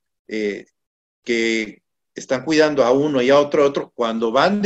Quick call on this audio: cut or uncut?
uncut